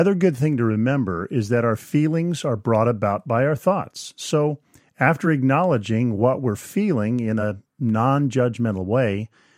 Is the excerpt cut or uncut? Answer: uncut